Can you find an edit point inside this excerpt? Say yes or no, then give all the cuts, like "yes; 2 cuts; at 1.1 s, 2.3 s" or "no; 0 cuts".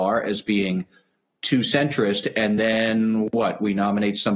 no; 0 cuts